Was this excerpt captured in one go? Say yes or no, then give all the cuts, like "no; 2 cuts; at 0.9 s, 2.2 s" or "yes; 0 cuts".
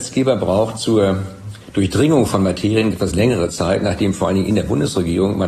no; 1 cut; at 2.9 s